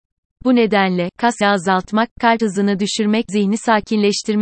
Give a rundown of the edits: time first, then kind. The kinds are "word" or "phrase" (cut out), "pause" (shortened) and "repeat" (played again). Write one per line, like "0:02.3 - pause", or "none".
0:01.4 - word
0:02.4 - word
0:03.3 - word